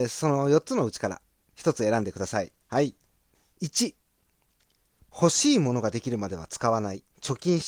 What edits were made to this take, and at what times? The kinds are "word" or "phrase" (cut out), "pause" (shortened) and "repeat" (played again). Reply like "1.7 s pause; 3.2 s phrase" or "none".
1.4 s pause; 2.6 s pause; 3.3 s pause